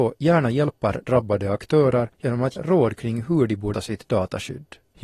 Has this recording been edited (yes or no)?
yes